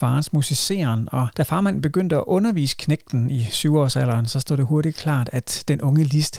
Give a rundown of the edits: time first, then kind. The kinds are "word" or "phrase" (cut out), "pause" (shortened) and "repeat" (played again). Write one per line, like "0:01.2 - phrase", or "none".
none

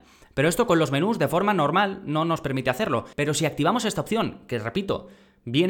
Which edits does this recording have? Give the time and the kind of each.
0:03.1 - pause

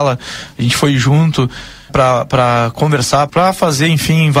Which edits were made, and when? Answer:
0:01.9 - word
0:03.3 - word

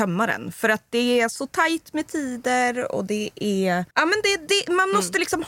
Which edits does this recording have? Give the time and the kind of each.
0:03.9 - pause

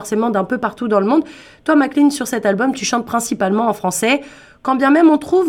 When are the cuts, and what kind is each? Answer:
none

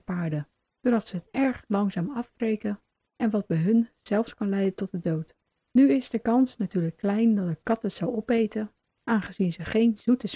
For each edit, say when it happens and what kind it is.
0:05.6 - pause

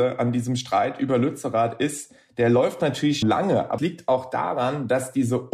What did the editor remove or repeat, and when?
0:03.2 - word
0:03.8 - word

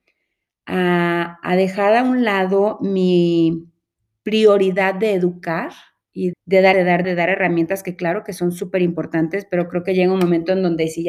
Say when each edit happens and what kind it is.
0:06.3 - word
0:06.7 - word
0:07.0 - word

